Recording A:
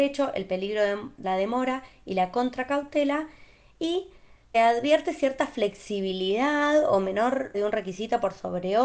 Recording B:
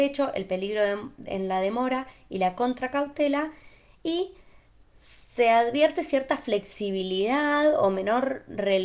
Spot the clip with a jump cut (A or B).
A